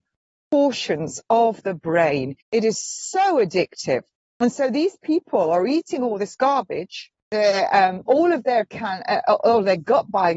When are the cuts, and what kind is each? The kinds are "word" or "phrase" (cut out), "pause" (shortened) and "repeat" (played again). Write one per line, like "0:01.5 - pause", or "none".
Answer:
0:02.4 - pause
0:04.2 - pause
0:07.2 - pause